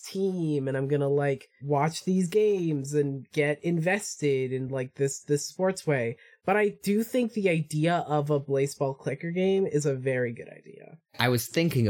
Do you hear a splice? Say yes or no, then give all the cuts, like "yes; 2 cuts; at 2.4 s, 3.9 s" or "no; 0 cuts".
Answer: no; 0 cuts